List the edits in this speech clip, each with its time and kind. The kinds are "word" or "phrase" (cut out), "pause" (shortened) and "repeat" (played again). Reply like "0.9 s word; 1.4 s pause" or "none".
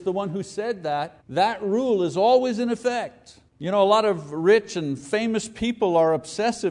1.2 s pause; 3.5 s pause

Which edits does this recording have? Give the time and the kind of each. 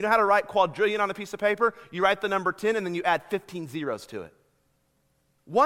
none

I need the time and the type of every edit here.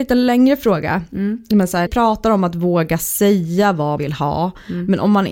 1.9 s word; 4.0 s word

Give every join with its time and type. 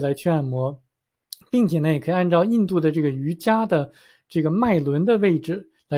none

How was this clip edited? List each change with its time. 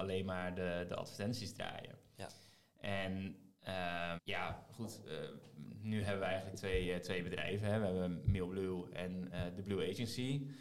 4.2 s word

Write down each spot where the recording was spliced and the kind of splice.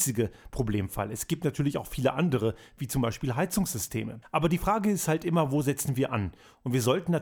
4.2 s pause

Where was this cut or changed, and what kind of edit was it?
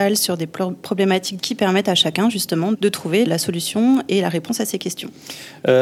1.4 s word; 2.7 s word; 3.3 s word

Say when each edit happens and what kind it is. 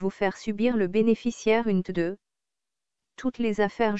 1.8 s word

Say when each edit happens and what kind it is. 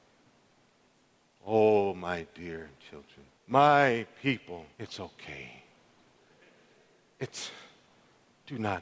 3.3 s pause; 4.7 s pause

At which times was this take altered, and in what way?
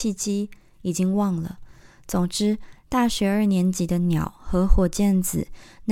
none

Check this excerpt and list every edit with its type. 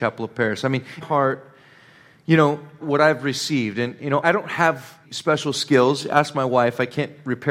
1.0 s phrase; 2.8 s phrase; 4.2 s word; 5.0 s phrase

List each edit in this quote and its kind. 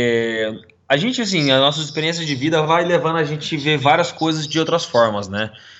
none

